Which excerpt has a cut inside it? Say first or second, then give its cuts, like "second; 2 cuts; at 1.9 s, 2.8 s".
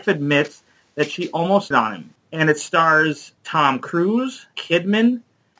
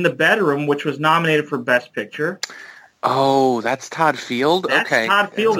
first; 4 cuts; at 1.7 s, 2.2 s, 3.4 s, 4.5 s